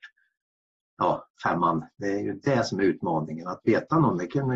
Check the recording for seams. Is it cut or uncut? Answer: uncut